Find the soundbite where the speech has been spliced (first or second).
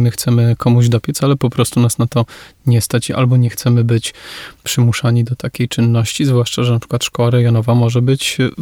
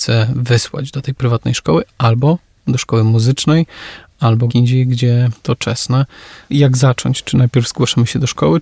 second